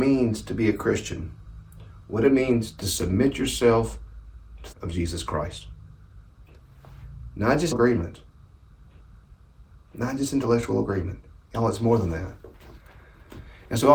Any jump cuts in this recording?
yes; 3 cuts; at 2.8 s, 4.7 s, 7.7 s

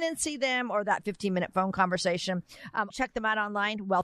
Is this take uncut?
no; 1 cut; at 2.9 s

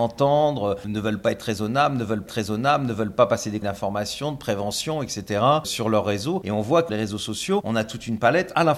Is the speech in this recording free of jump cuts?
no; 3 cuts; at 2.3 s, 3.6 s, 6.9 s

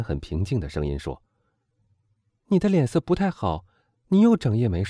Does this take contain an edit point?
no; 0 cuts

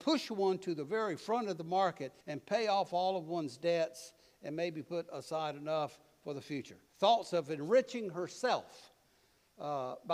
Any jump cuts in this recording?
yes; 2 cuts; at 2.2 s, 6.9 s

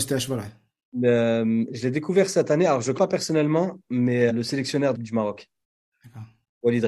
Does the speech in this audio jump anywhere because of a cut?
yes; 3 cuts; at 3.0 s, 4.3 s, 4.9 s

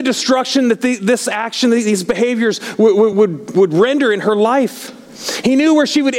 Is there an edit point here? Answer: no; 0 cuts

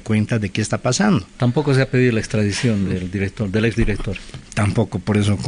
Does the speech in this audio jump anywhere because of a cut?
no; 0 cuts

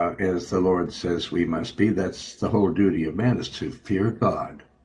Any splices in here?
no; 0 cuts

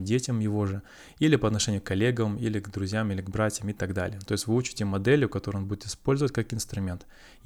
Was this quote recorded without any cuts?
yes; 0 cuts

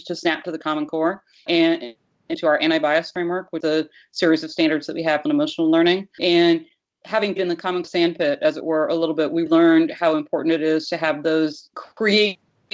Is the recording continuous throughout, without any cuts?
no; 9 cuts; at 1.5 s, 2.3 s, 3.6 s, 5.3 s, 6.2 s, 7.4 s, 7.8 s, 9.5 s, 11.7 s

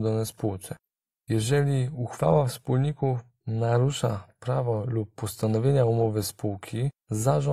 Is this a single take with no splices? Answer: yes; 0 cuts

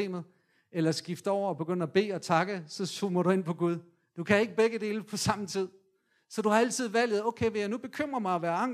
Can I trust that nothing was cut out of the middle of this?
yes; 0 cuts

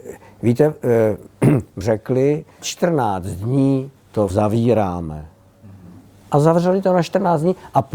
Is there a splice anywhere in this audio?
yes; 3 cuts; at 1.8 s, 2.6 s, 4.3 s

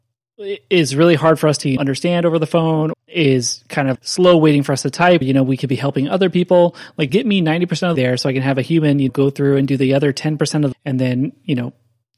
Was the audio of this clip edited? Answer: yes; 8 cuts; at 1.8 s, 2.9 s, 3.9 s, 5.2 s, 7.1 s, 7.9 s, 9.1 s, 10.7 s

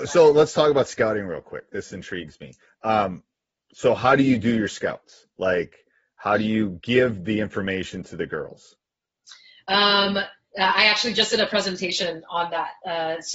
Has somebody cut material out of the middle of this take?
no; 0 cuts

